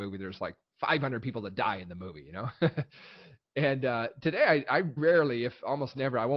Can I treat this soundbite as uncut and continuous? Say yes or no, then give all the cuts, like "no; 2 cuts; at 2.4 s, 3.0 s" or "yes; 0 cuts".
no; 1 cut; at 5.0 s